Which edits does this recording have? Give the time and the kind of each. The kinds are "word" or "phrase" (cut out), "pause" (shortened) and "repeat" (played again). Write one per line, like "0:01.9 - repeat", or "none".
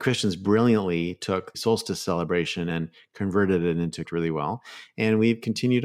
0:01.5 - word
0:02.7 - word
0:04.0 - phrase